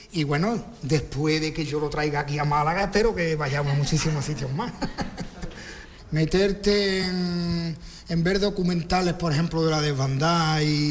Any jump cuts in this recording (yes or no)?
no